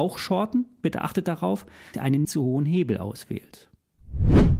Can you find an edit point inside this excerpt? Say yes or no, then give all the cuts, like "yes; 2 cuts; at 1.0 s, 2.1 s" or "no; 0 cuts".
yes; 2 cuts; at 1.9 s, 2.2 s